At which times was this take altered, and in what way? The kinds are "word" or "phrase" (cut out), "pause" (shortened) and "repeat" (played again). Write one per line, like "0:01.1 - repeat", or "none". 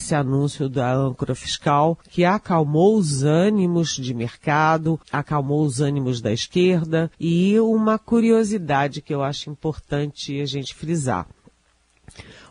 0:02.0 - pause
0:05.0 - pause
0:07.1 - pause